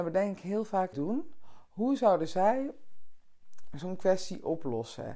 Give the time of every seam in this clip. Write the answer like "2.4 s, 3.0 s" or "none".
0.9 s